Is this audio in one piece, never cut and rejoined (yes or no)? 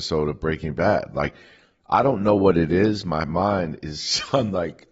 yes